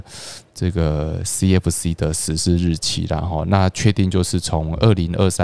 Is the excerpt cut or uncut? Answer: uncut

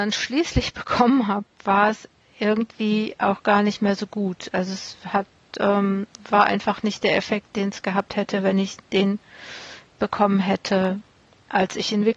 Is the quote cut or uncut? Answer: uncut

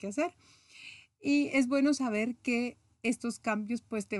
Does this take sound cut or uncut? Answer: uncut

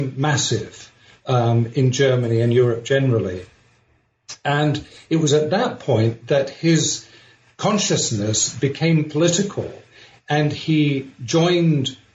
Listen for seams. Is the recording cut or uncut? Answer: uncut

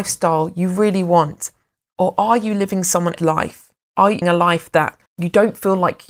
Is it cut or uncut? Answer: cut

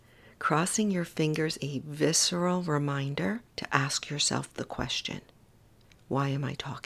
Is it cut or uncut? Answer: cut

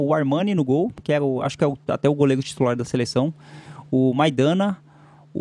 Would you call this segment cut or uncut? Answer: uncut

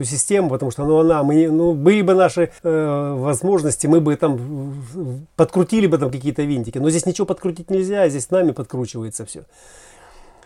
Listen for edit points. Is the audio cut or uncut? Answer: cut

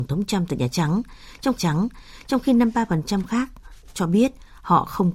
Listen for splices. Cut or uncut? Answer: cut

